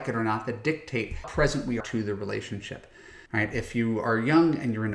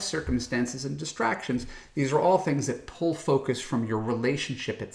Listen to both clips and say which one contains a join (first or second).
first